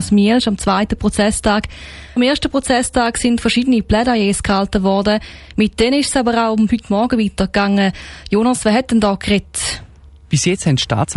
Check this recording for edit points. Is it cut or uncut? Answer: cut